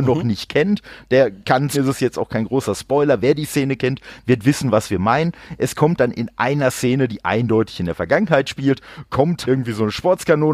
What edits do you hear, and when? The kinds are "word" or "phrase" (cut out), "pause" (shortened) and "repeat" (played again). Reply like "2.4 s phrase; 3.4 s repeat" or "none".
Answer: 1.4 s pause; 1.7 s phrase; 6.0 s word; 9.4 s word